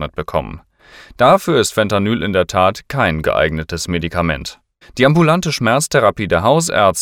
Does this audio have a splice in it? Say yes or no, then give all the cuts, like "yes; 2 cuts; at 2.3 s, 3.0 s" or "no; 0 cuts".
yes; 2 cuts; at 3.2 s, 4.8 s